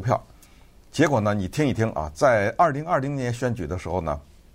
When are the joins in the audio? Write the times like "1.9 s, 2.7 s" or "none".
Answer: none